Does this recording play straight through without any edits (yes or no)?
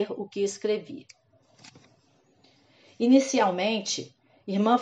yes